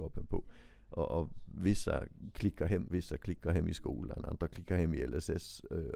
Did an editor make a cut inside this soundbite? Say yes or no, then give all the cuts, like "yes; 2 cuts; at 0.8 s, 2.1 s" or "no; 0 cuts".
yes; 1 cut; at 2.9 s